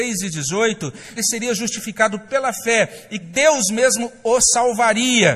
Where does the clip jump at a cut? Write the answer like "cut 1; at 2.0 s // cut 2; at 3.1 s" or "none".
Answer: cut 1; at 1.2 s // cut 2; at 3.2 s